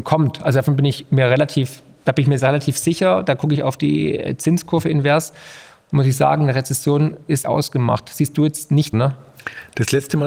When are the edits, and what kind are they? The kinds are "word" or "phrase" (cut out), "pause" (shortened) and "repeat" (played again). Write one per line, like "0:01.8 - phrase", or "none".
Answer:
0:07.4 - word
0:08.9 - word